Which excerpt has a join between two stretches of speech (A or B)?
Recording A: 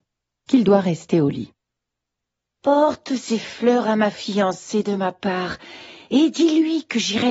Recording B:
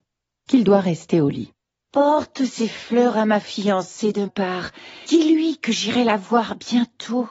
B